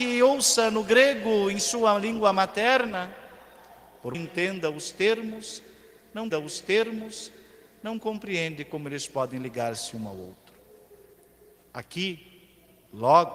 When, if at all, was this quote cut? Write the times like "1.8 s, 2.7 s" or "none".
4.1 s, 6.3 s